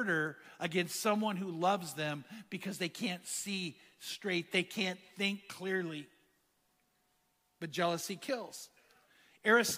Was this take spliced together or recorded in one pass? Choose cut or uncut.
uncut